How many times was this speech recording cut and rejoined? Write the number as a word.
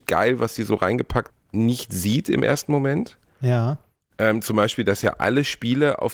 one